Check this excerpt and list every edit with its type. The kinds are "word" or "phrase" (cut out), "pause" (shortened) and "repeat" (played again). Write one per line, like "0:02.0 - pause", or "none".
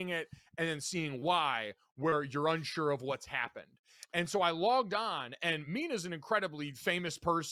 none